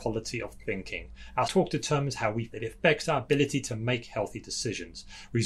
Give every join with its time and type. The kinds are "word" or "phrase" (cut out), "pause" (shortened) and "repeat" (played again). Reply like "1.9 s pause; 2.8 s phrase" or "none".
1.5 s word; 2.5 s word